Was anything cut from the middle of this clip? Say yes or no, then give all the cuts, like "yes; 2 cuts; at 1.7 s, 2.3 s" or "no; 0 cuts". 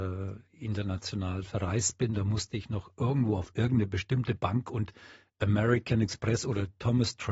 no; 0 cuts